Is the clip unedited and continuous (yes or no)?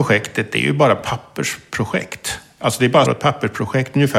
no